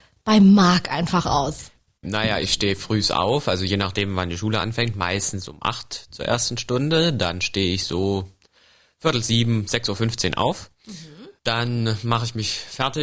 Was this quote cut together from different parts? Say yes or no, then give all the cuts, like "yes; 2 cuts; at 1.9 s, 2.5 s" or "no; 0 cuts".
no; 0 cuts